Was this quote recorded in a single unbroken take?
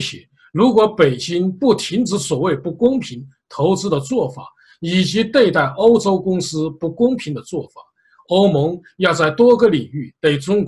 yes; 0 cuts

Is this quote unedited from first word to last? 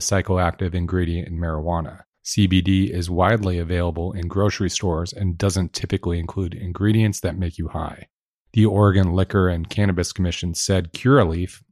yes; 0 cuts

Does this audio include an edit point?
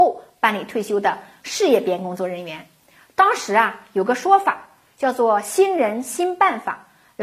no; 0 cuts

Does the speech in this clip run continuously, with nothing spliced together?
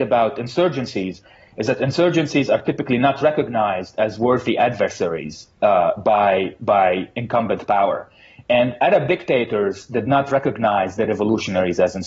yes; 0 cuts

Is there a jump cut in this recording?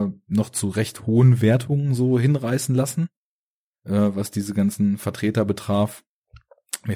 no; 0 cuts

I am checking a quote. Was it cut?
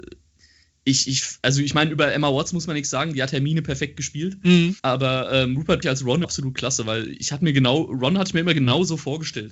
yes; 3 cuts; at 4.8 s, 5.8 s, 6.2 s

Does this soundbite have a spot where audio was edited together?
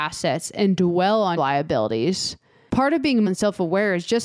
yes; 2 cuts; at 1.4 s, 3.3 s

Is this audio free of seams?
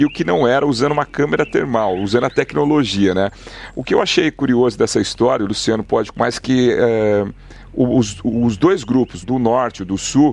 no; 2 cuts; at 6.1 s, 9.2 s

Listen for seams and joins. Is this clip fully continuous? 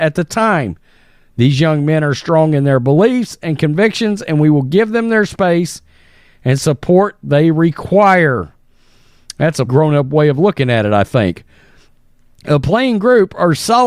no; 1 cut; at 9.7 s

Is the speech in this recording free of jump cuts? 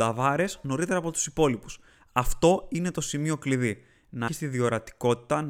no; 1 cut; at 4.3 s

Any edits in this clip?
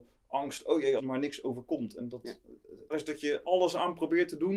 yes; 3 cuts; at 1.0 s, 2.9 s, 3.4 s

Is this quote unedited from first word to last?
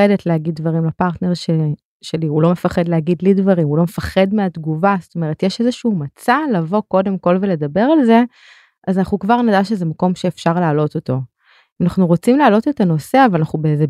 yes; 0 cuts

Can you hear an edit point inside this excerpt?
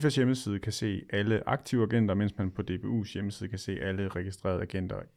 no; 0 cuts

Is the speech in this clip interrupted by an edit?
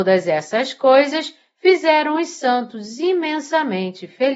no; 0 cuts

